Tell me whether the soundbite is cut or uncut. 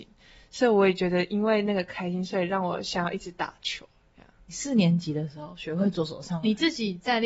uncut